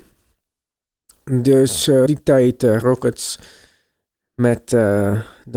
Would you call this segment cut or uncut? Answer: cut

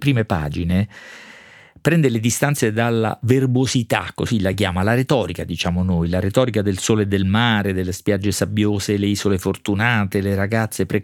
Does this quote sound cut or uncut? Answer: uncut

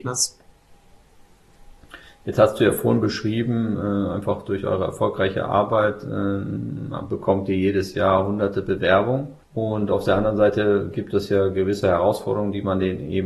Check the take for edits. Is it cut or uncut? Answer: cut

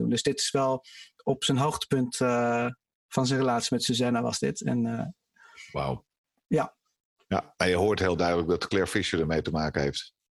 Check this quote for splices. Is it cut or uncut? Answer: uncut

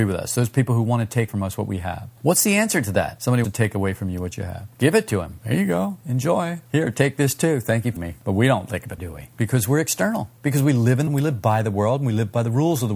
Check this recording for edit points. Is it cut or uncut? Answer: cut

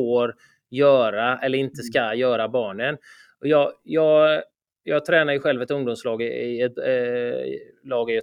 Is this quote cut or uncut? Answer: uncut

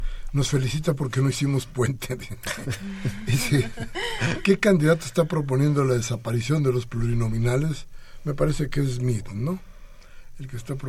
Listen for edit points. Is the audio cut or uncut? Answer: uncut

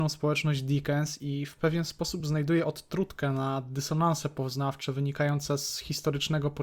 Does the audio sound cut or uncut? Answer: uncut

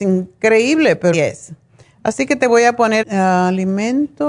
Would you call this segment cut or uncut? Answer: cut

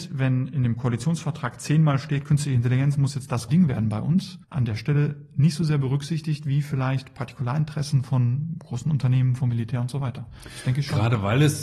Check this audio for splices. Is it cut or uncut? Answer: cut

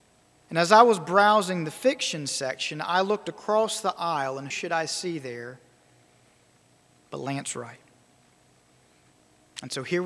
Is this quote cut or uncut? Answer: cut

